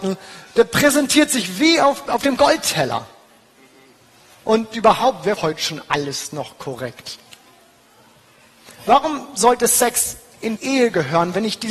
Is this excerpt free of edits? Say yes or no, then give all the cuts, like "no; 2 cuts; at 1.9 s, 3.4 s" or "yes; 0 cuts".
no; 3 cuts; at 2.1 s, 5.4 s, 10.6 s